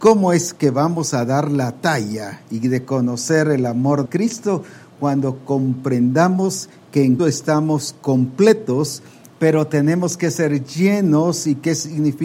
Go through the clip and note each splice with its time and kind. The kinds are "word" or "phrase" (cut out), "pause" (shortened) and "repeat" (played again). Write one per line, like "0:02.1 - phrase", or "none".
0:04.1 - word
0:07.2 - word